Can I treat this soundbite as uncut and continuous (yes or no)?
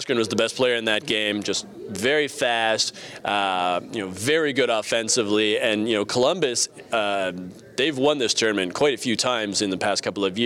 yes